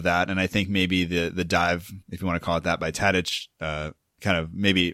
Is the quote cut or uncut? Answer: uncut